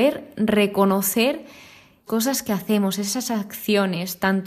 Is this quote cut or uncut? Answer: cut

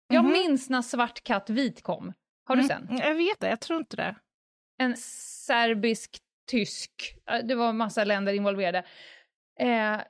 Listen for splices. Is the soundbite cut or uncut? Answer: cut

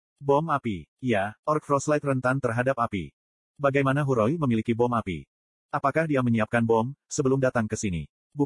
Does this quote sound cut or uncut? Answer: uncut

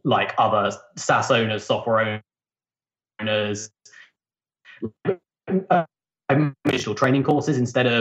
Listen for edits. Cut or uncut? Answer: uncut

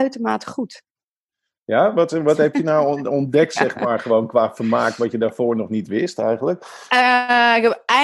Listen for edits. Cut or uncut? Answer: uncut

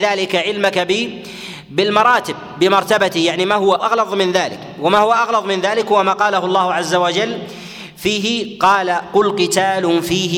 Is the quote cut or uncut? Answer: cut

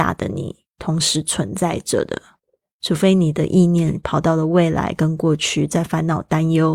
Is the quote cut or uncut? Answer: uncut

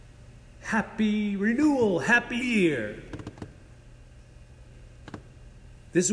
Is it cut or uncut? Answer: cut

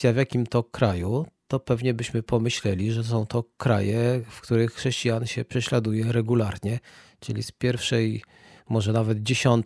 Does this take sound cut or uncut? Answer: uncut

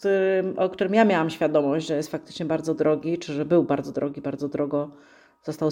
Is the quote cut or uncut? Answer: uncut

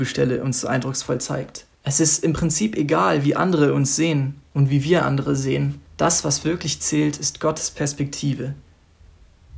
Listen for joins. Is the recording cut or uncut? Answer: cut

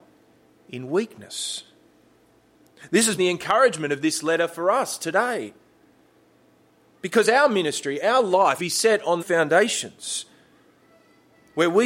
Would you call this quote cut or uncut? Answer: cut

